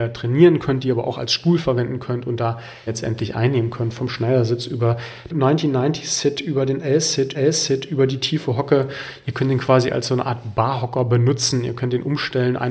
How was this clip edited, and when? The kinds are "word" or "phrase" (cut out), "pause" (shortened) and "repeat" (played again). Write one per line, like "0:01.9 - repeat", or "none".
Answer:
0:02.9 - phrase
0:05.3 - phrase
0:07.3 - repeat